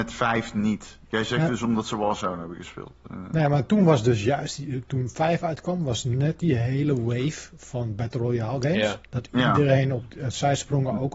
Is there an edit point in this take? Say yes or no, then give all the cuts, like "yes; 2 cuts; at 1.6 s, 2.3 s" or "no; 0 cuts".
yes; 1 cut; at 9.1 s